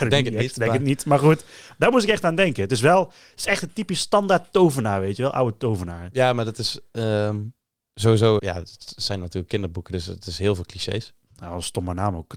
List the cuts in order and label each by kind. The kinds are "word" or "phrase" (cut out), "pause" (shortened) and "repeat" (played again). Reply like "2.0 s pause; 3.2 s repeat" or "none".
8.4 s word